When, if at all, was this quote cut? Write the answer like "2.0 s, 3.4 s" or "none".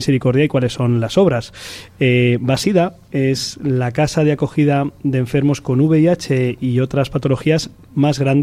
none